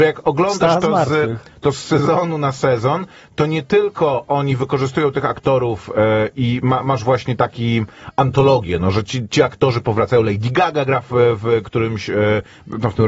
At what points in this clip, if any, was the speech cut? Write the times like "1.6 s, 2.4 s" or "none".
none